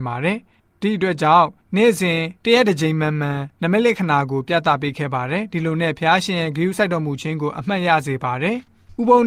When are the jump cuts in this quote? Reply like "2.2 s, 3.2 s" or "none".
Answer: 2.4 s, 3.5 s